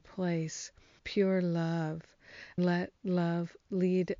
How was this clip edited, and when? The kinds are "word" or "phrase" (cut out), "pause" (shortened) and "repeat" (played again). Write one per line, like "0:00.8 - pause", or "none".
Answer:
0:01.0 - word
0:02.6 - word